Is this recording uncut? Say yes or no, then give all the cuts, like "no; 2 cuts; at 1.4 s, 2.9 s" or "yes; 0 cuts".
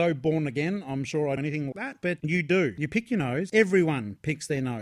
no; 3 cuts; at 1.4 s, 1.7 s, 2.2 s